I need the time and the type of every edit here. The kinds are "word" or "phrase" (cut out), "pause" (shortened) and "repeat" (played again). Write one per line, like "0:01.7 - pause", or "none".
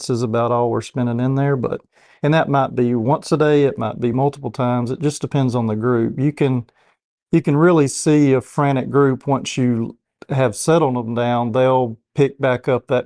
none